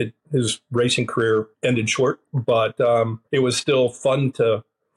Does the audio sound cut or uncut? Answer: cut